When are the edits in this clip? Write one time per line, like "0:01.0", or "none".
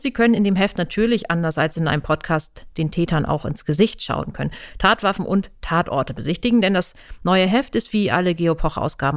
none